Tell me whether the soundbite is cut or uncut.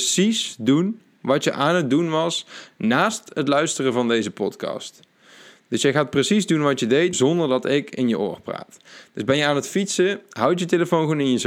cut